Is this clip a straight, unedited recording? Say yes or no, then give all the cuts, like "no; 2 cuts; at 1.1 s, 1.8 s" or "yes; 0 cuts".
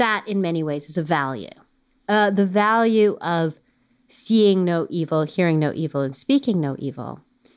yes; 0 cuts